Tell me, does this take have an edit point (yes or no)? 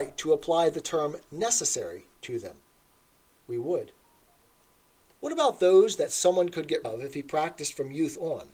yes